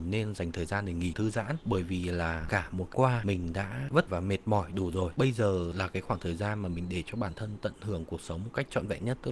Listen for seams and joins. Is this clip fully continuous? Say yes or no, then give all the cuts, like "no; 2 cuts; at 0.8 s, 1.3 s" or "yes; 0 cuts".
no; 3 cuts; at 1.1 s, 2.9 s, 4.1 s